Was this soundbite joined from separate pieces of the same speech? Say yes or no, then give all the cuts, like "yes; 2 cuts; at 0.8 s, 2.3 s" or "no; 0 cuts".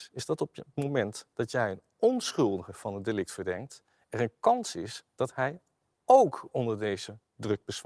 no; 0 cuts